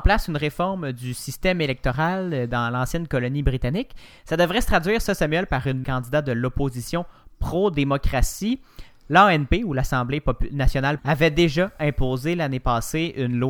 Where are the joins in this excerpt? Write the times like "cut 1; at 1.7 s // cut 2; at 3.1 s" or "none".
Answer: cut 1; at 5.8 s // cut 2; at 11.0 s